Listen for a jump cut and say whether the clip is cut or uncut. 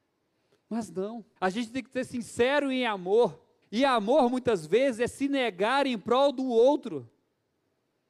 cut